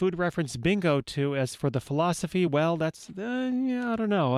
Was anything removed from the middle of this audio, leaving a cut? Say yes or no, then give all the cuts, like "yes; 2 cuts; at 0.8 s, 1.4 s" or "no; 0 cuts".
no; 0 cuts